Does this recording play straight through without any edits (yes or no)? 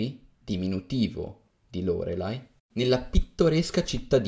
yes